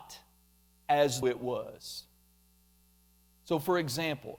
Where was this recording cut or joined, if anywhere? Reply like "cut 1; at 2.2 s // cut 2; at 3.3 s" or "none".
cut 1; at 1.2 s

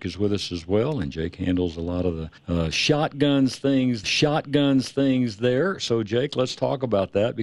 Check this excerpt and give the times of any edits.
cut 1; at 2.4 s // cut 2; at 4.0 s

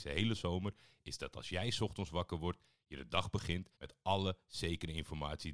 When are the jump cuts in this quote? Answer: cut 1; at 3.7 s

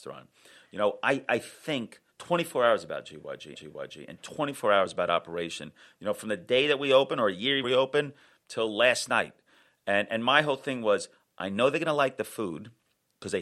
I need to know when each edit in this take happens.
cut 1; at 2.1 s // cut 2; at 3.5 s // cut 3; at 7.6 s

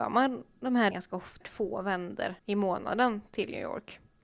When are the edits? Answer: cut 1; at 0.9 s // cut 2; at 1.4 s // cut 3; at 2.4 s

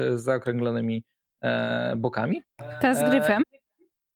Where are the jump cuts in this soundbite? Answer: none

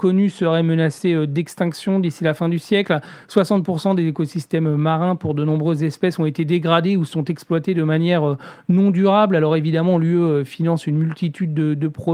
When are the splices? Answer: none

